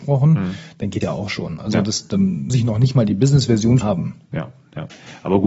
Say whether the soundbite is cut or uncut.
cut